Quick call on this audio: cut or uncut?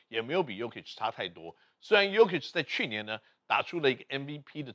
uncut